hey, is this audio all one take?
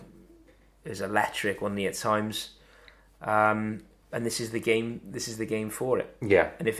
yes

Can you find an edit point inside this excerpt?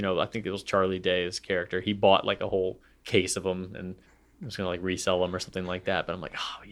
yes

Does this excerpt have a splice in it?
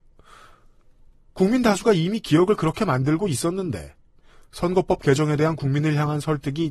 no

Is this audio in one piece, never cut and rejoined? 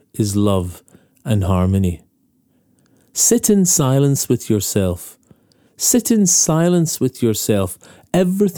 yes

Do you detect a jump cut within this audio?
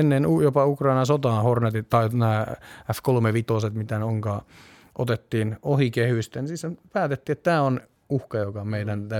no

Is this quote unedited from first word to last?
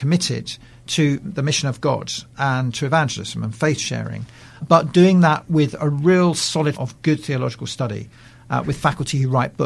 no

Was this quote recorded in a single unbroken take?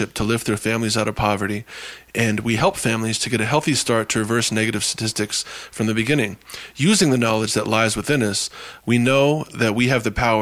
yes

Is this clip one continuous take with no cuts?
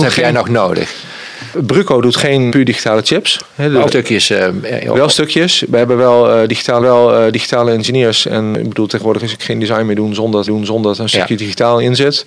no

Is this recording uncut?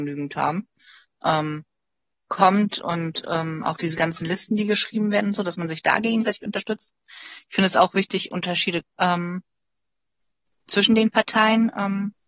no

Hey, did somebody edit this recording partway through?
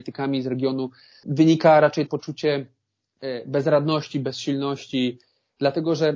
yes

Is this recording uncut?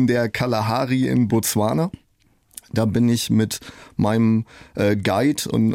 yes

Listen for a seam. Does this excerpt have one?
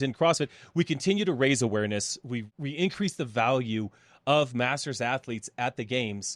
no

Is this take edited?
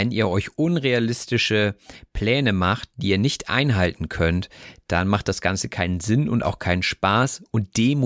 no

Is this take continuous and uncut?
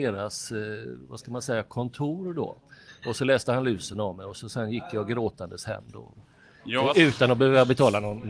yes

